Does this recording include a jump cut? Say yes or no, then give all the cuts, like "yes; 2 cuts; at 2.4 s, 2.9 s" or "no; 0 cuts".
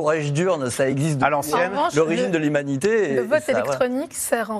no; 0 cuts